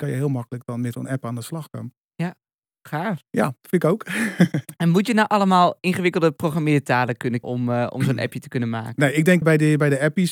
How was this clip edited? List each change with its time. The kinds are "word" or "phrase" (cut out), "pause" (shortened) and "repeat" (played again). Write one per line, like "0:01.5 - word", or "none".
0:00.9 - word
0:02.6 - pause
0:07.4 - word
0:09.4 - word